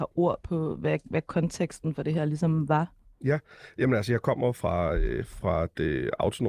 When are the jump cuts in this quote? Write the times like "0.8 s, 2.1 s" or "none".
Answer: none